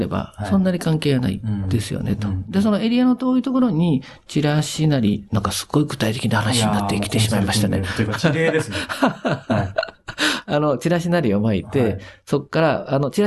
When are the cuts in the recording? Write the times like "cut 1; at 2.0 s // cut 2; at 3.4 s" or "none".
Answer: none